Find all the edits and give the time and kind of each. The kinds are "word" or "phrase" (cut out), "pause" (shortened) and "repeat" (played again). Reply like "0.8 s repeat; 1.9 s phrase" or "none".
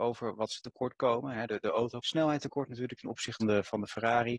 1.5 s word; 2.0 s word; 3.4 s word